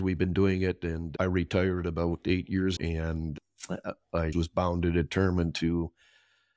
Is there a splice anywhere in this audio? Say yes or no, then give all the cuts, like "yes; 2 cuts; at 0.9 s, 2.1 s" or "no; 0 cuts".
yes; 2 cuts; at 2.8 s, 4.3 s